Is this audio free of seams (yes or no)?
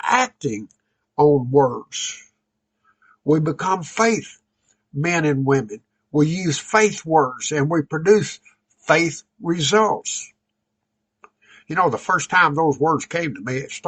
yes